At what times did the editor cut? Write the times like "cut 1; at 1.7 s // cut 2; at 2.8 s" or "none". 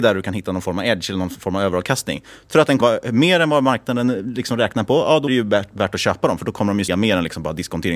cut 1; at 2.8 s // cut 2; at 5.3 s // cut 3; at 6.9 s